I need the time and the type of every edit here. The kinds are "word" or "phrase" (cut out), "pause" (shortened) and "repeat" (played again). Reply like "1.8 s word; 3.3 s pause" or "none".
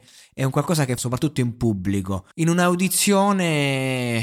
1.0 s word; 2.3 s pause